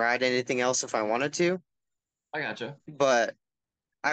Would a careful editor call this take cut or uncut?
uncut